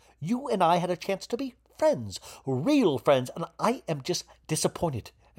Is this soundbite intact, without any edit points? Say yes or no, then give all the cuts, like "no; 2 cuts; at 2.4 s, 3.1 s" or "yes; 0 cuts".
yes; 0 cuts